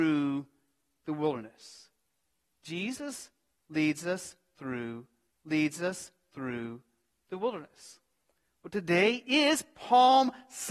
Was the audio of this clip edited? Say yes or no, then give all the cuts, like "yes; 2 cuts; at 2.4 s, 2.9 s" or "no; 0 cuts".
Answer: yes; 1 cut; at 5.3 s